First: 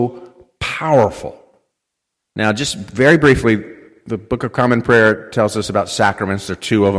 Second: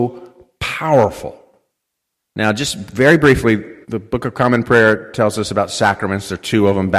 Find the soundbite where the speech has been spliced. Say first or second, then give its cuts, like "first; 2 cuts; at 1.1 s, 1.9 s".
second; 1 cut; at 3.8 s